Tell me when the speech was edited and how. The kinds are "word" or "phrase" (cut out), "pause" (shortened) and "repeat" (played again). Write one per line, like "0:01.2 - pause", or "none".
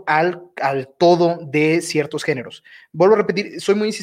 none